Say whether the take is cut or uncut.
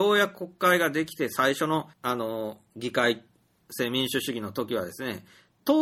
cut